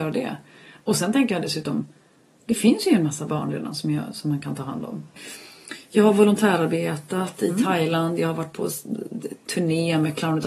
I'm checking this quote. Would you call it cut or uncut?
uncut